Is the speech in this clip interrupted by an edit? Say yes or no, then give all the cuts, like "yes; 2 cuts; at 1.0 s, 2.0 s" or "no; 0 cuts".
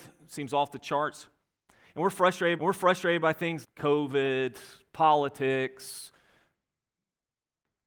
yes; 2 cuts; at 2.6 s, 3.6 s